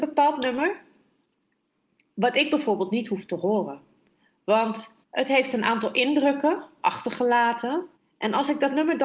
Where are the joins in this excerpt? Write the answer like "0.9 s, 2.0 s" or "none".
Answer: 5.0 s, 8.0 s